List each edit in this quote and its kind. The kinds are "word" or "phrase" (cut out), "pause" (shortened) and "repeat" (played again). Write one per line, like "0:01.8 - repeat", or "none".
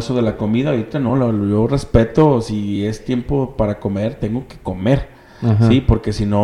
none